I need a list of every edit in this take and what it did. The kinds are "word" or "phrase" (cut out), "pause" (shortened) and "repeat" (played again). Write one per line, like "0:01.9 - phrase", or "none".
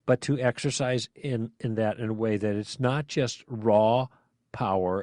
none